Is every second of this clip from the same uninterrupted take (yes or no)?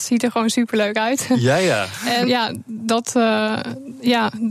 no